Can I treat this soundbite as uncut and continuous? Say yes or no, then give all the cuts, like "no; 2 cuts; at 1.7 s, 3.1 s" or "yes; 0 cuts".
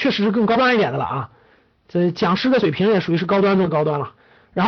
yes; 0 cuts